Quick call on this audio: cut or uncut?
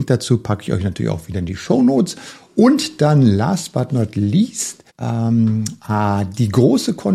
cut